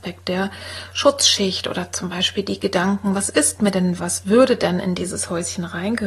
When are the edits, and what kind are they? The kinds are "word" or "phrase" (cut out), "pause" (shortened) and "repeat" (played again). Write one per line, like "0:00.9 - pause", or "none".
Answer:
0:04.0 - word